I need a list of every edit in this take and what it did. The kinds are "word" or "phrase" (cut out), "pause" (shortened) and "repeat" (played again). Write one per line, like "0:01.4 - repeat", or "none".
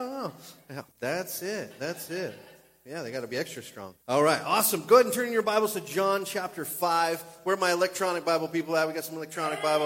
0:00.9 - pause
0:04.0 - pause